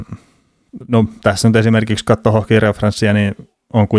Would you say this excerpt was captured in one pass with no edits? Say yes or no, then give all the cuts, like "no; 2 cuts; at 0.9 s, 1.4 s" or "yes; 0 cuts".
yes; 0 cuts